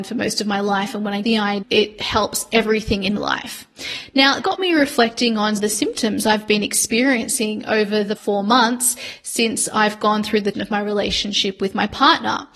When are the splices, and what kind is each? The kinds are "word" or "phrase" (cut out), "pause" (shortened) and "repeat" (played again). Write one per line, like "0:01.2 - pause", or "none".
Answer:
0:01.2 - word
0:01.6 - word
0:03.2 - word
0:04.4 - word
0:05.6 - word
0:08.2 - word
0:10.5 - word